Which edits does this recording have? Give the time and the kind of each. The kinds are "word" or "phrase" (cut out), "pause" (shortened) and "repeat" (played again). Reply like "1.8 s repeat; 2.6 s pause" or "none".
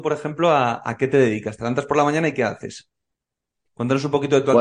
none